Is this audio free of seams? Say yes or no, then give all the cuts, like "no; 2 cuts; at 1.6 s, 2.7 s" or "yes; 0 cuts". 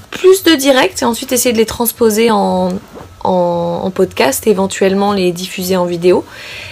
yes; 0 cuts